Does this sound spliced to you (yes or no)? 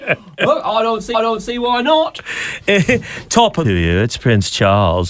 yes